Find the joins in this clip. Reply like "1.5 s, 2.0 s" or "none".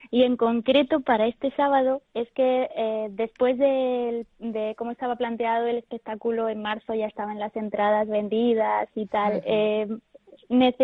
2.0 s

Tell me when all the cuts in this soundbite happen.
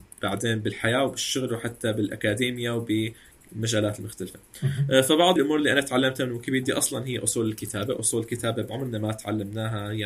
5.4 s

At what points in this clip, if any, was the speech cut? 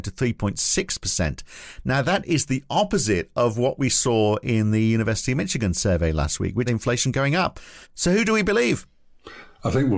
6.7 s, 7.8 s

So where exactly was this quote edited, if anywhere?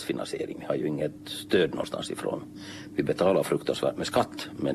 none

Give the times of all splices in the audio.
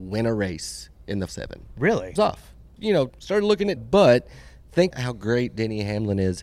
1.3 s, 2.2 s, 2.8 s, 3.1 s, 3.8 s, 4.9 s

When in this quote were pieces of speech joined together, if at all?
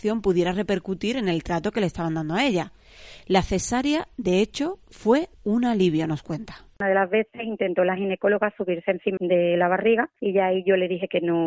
5.3 s, 9.2 s, 10.2 s

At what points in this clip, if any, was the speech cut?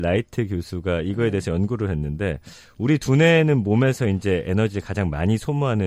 none

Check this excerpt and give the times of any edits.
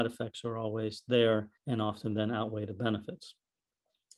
1.6 s

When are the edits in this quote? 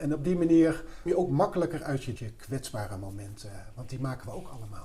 1.1 s, 2.2 s

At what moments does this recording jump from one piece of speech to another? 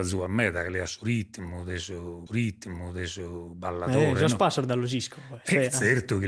2.3 s

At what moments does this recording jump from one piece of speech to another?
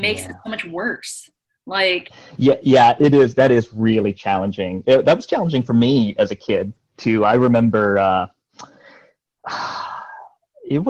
none

